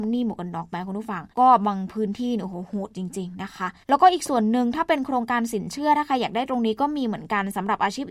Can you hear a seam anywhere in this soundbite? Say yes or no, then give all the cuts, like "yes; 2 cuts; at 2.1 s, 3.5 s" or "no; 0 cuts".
yes; 2 cuts; at 1.3 s, 3.8 s